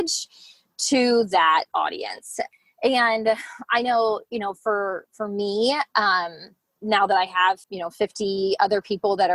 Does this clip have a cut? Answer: yes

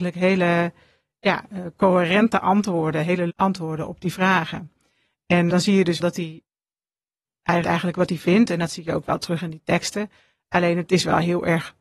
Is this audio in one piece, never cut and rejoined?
no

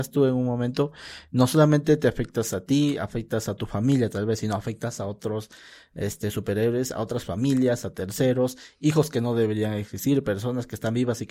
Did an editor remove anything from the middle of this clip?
no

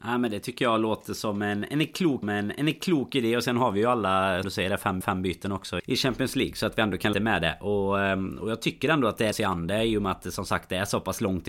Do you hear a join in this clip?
yes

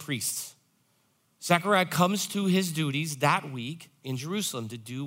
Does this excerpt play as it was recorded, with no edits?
yes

